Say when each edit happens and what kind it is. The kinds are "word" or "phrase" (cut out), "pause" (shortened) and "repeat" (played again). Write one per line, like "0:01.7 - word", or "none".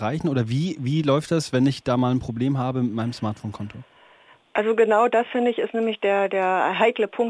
none